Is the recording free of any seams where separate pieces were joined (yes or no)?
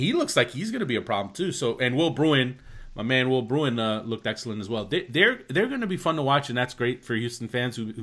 yes